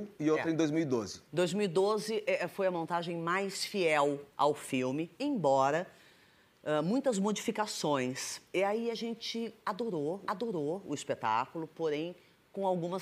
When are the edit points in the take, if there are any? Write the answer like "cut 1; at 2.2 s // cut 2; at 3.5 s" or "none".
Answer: cut 1; at 1.3 s // cut 2; at 4.3 s // cut 3; at 10.2 s